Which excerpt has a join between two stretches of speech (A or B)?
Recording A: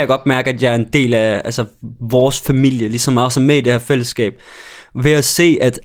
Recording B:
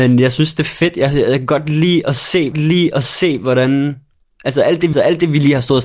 B